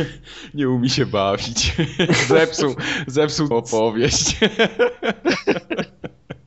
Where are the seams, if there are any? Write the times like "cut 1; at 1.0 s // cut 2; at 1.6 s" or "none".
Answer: cut 1; at 3.5 s